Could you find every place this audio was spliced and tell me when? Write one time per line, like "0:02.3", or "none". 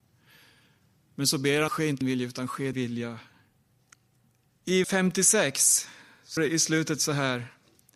0:01.7
0:02.0
0:02.7
0:04.8
0:06.4

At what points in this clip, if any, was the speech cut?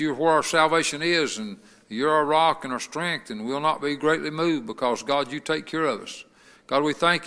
none

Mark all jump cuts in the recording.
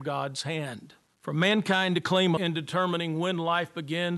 0:01.1
0:02.4

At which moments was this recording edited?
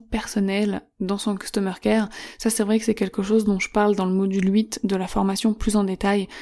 none

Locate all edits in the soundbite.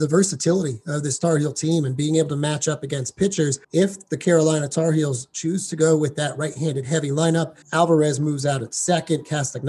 0:03.6
0:07.6

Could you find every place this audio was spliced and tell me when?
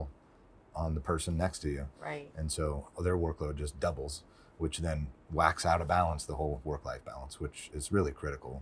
none

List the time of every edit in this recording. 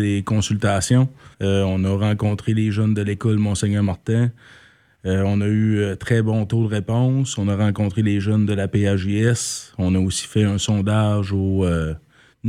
0:01.3

